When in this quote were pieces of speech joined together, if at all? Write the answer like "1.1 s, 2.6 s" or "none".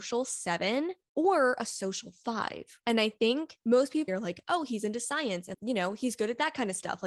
1.0 s, 3.6 s, 4.1 s, 5.5 s